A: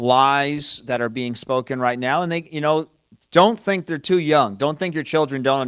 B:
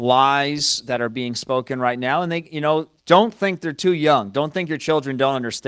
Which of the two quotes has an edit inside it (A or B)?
B